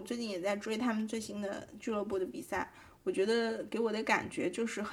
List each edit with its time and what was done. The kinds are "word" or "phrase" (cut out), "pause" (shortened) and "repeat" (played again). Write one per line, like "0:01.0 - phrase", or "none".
none